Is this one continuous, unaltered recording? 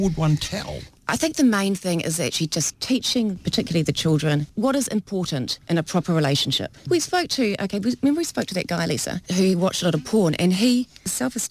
no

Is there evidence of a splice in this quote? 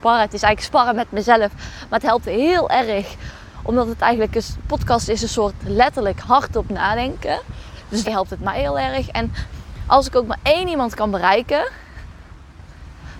yes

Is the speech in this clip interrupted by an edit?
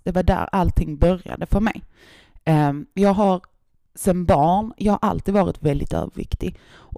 no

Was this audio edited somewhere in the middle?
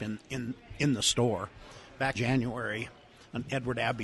yes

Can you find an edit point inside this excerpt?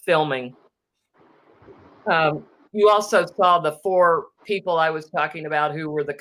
no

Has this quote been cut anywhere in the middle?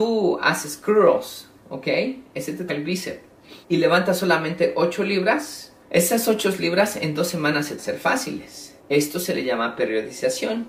yes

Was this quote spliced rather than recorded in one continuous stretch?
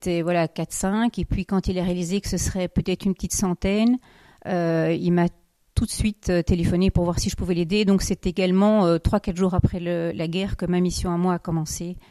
no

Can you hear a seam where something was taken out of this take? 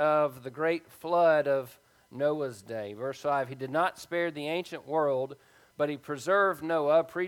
no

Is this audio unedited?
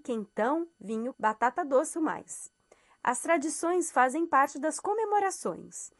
no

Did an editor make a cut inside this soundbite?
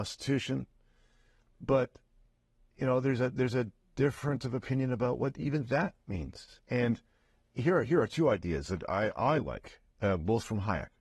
no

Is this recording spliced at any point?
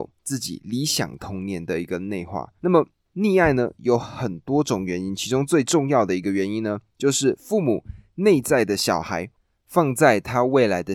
yes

